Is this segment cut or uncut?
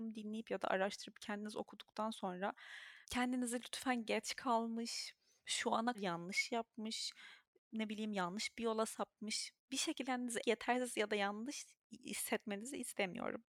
cut